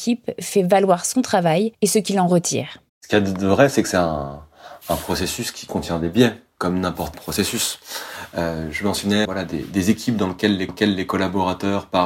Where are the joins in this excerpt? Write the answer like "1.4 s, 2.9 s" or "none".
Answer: 1.7 s, 2.9 s, 7.1 s, 9.2 s, 10.7 s